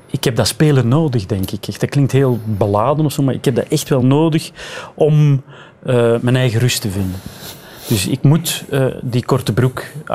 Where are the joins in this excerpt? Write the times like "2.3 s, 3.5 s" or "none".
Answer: none